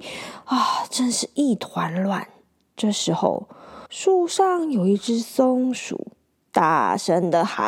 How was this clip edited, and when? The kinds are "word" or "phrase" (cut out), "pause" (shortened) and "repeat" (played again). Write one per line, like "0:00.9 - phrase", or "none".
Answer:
0:03.9 - pause